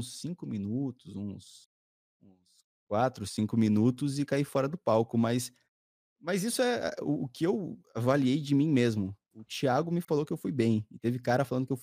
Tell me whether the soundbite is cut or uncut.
uncut